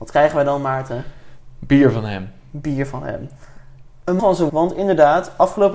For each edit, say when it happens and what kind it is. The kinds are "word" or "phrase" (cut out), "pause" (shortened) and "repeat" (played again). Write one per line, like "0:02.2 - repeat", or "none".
0:04.2 - word
0:04.5 - word